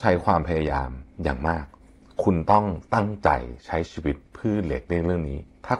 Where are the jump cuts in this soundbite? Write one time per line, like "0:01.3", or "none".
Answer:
none